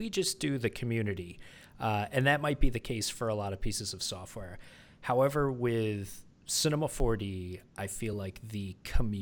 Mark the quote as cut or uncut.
uncut